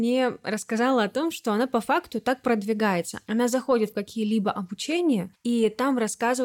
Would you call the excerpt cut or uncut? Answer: uncut